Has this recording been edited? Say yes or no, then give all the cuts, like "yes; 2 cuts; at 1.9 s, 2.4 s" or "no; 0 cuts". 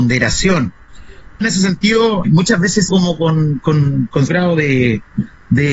yes; 4 cuts; at 1.4 s, 2.2 s, 2.9 s, 4.3 s